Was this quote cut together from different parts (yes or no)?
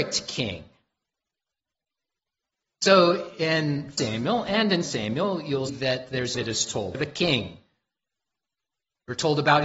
yes